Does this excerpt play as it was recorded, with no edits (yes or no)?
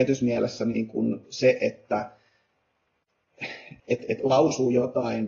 no